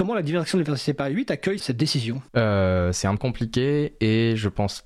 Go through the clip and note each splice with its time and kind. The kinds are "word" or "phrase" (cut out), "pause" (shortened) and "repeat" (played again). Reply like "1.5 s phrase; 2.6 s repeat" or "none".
1.6 s word; 2.3 s pause; 3.2 s phrase